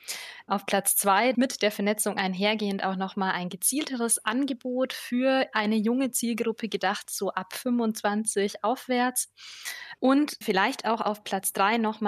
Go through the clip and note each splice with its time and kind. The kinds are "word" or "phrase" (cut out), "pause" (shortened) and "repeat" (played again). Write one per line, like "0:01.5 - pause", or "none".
0:01.3 - phrase